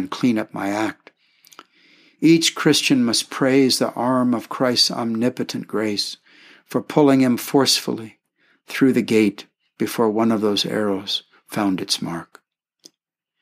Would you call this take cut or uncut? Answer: uncut